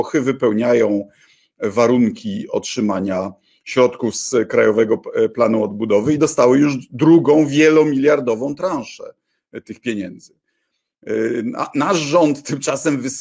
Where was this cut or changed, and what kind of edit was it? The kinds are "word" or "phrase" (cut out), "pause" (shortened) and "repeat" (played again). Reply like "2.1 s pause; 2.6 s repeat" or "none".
none